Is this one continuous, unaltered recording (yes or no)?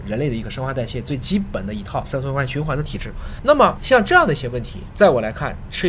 yes